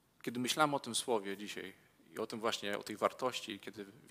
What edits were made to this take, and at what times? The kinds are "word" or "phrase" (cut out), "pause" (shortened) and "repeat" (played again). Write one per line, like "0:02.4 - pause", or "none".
none